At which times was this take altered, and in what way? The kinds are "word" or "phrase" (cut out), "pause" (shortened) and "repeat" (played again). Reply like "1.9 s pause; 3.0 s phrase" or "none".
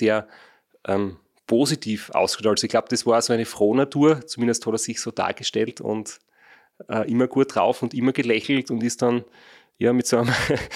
none